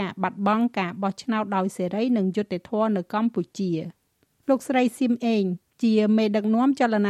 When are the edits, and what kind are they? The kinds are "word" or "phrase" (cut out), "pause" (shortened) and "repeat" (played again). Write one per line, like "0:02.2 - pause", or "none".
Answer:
none